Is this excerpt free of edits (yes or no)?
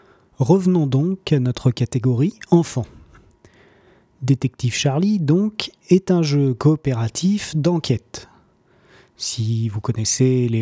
yes